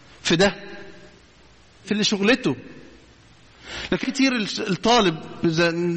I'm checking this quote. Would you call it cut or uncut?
cut